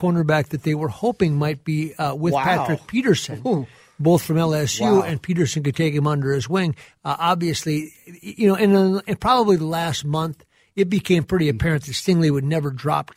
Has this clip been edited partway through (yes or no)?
no